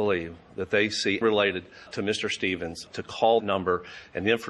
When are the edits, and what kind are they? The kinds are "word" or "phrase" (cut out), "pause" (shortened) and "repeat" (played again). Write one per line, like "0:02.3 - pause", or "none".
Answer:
0:01.2 - word
0:01.9 - word
0:02.9 - word
0:03.4 - word